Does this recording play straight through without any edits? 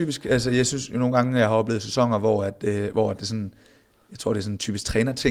yes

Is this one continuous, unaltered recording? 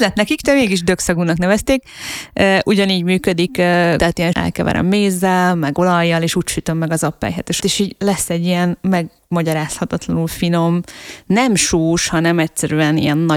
no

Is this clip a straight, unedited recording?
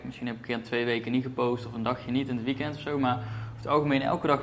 yes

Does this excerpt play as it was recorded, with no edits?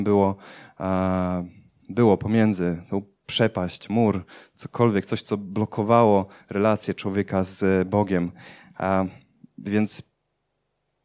yes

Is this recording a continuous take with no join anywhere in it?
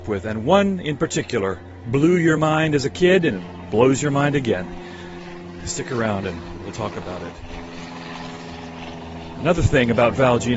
yes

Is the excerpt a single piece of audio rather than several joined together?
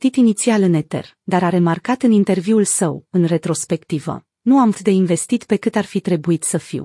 no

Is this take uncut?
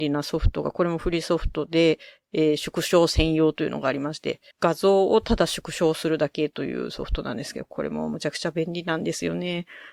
no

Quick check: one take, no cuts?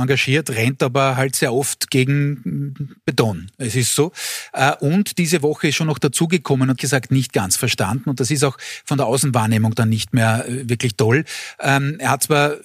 no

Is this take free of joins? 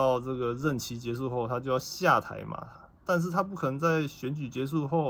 no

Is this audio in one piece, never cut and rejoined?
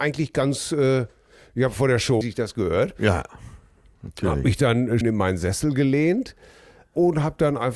no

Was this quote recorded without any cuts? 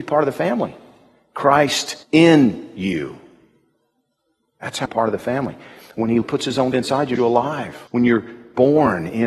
no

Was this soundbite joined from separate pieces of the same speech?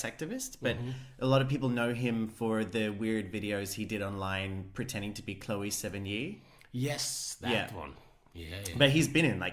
no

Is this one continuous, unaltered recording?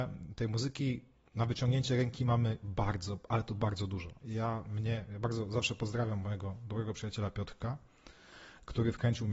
yes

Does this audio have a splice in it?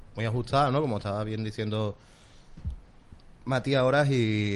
no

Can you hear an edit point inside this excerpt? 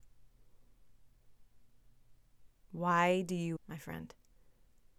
yes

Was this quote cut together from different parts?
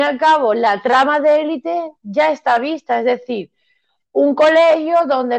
no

